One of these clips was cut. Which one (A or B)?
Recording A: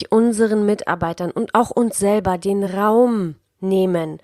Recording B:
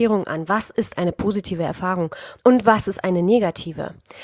B